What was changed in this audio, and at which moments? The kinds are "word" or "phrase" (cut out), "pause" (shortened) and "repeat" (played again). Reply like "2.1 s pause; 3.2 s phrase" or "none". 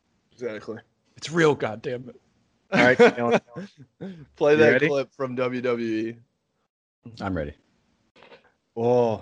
none